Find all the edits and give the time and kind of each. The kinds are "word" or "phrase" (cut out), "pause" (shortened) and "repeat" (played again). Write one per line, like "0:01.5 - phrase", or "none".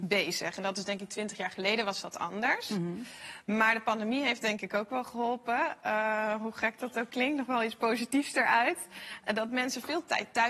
none